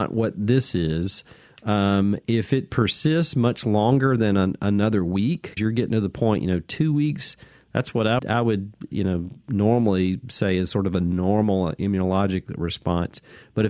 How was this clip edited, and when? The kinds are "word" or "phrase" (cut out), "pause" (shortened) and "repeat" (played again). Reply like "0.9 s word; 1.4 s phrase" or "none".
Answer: 5.6 s word; 8.2 s word